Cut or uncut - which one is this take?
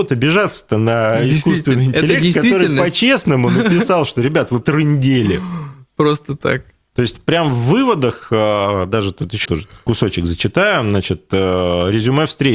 cut